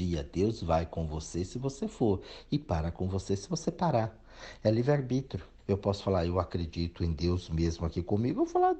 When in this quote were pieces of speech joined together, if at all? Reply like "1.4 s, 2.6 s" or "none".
5.6 s